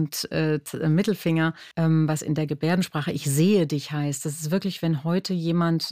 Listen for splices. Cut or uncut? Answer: cut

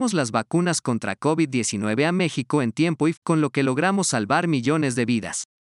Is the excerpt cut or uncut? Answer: cut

